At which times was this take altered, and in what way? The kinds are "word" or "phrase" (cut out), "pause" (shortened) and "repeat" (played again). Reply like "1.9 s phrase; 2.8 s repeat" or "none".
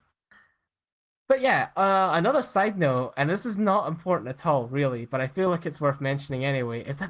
none